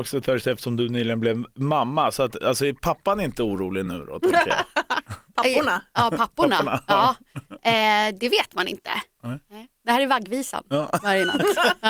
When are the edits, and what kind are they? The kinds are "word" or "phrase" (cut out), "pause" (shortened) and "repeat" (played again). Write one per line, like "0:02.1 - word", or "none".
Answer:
none